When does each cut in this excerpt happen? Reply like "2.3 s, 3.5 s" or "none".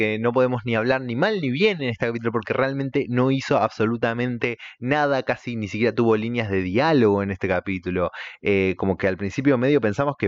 none